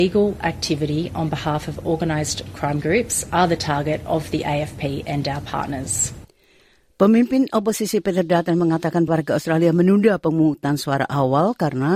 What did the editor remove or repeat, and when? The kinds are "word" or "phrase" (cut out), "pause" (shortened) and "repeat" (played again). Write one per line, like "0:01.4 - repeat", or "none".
0:09.1 - word